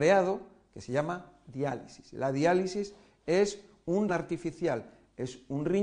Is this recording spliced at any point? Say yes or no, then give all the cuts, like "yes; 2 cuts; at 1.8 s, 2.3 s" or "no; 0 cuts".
yes; 1 cut; at 4.1 s